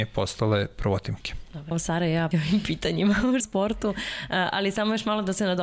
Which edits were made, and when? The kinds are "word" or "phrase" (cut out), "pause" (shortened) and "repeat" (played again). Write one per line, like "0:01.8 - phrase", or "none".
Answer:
0:01.7 - word
0:02.3 - word
0:03.4 - word